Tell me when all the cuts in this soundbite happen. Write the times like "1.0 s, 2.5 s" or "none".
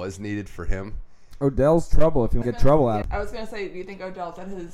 2.4 s, 3.0 s

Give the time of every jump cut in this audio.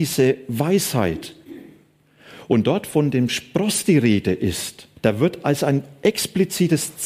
5.0 s

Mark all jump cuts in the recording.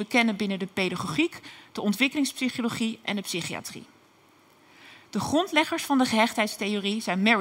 none

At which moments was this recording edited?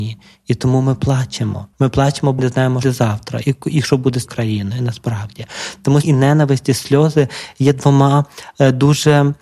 1.7 s, 2.4 s, 2.8 s, 4.3 s, 6.0 s

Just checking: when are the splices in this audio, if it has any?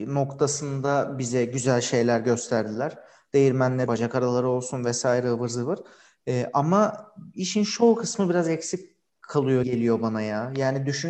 3.9 s, 9.6 s

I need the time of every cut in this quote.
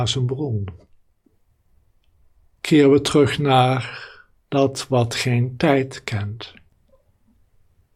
none

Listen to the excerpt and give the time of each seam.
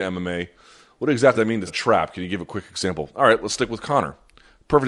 1.3 s, 1.7 s

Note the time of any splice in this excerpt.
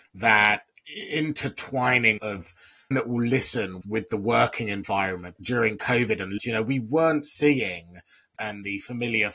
2.2 s, 2.9 s, 3.8 s, 5.4 s, 6.4 s, 8.4 s

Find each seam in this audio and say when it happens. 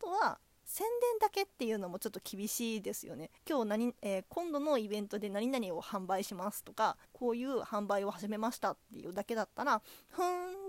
3.4 s, 4.3 s, 7.0 s

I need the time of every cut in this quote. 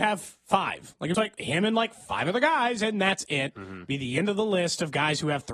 1.1 s

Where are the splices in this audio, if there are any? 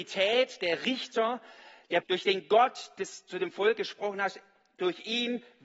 2.0 s

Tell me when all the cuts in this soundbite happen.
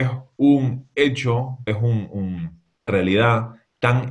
1.7 s, 2.9 s

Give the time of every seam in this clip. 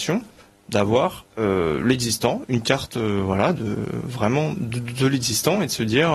1.3 s

